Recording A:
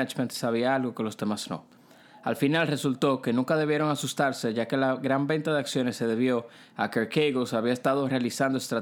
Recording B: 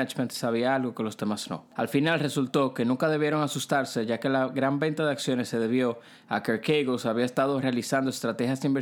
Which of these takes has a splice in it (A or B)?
B